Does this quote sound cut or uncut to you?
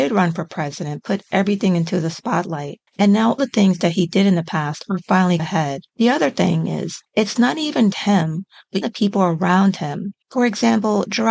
cut